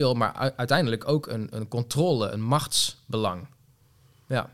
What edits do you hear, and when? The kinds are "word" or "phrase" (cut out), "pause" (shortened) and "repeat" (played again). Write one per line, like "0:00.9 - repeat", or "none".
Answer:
none

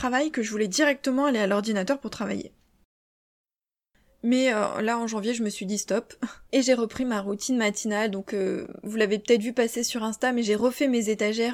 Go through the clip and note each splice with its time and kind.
none

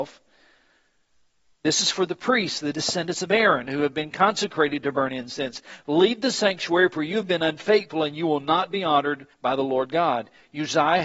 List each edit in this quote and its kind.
0:09.3 - pause

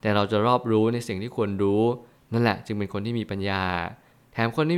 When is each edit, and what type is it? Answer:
none

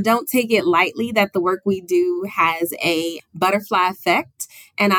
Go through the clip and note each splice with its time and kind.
0:03.2 - word

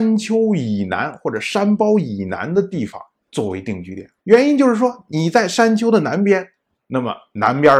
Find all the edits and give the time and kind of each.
0:04.2 - pause

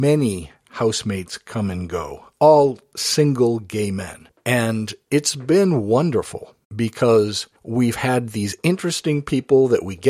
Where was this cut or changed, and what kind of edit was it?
0:06.6 - pause

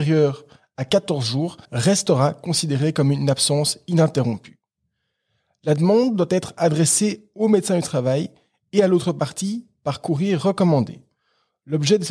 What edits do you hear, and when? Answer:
0:01.6 - pause

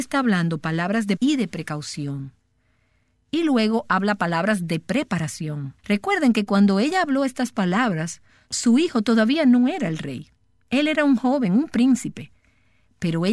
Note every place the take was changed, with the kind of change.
0:01.2 - word
0:05.8 - pause

